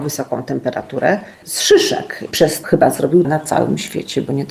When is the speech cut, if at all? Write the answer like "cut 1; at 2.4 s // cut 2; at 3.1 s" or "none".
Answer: cut 1; at 1.3 s // cut 2; at 2.3 s // cut 3; at 2.6 s // cut 4; at 3.2 s